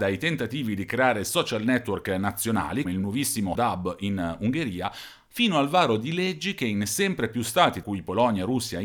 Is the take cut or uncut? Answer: cut